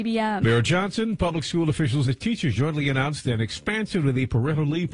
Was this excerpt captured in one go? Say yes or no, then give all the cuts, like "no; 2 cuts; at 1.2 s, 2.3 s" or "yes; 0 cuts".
no; 2 cuts; at 2.0 s, 2.5 s